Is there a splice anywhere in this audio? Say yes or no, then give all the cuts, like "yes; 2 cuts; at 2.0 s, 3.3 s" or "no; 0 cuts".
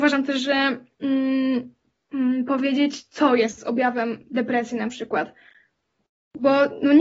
yes; 1 cut; at 1.9 s